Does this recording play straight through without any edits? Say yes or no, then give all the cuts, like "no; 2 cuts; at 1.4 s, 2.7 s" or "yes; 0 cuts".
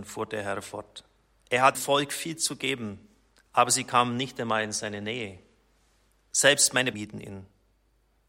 no; 2 cuts; at 1.7 s, 6.9 s